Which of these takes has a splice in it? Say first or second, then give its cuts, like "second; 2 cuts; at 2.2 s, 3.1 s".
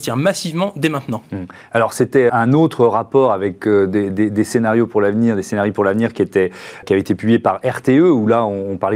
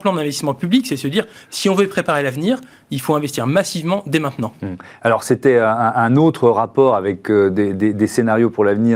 first; 2 cuts; at 2.3 s, 6.8 s